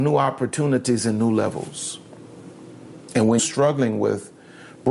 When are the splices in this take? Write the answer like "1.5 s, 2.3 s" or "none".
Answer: 3.4 s

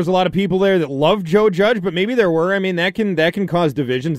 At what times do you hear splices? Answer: none

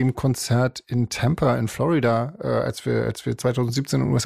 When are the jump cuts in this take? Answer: none

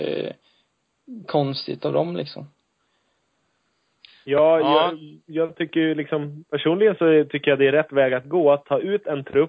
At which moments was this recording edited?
none

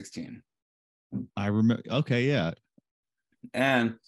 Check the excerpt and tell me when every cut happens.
1.3 s

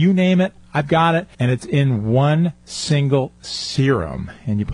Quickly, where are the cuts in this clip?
1.3 s

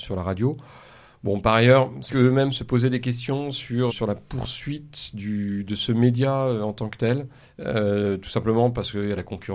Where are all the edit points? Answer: 2.1 s, 3.9 s, 7.4 s

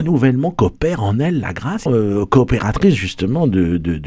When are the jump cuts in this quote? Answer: 1.9 s

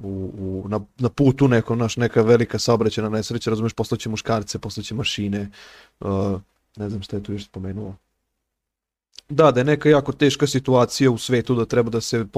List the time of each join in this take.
none

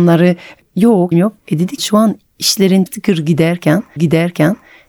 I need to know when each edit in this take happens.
1.1 s, 1.8 s, 2.9 s, 4.0 s

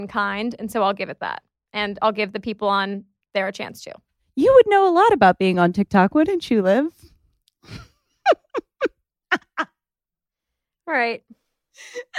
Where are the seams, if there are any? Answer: none

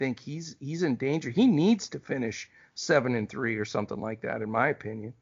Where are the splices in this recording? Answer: none

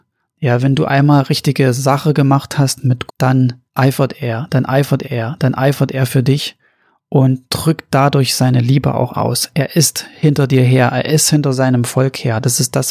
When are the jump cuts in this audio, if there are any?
3.1 s, 3.7 s, 5.0 s, 7.5 s, 9.1 s

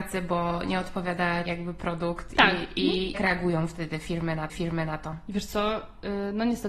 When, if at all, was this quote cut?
1.5 s, 3.1 s, 4.5 s

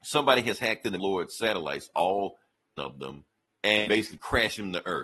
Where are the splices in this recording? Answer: 1.0 s, 2.8 s

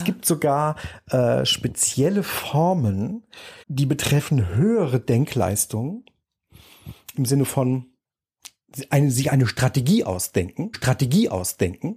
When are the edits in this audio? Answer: 3.6 s, 7.1 s, 10.7 s

